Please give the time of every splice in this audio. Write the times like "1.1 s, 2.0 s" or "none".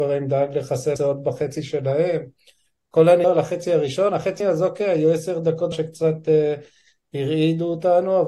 1.0 s, 3.2 s, 4.4 s, 5.7 s